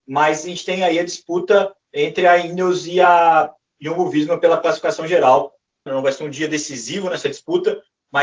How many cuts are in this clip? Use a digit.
0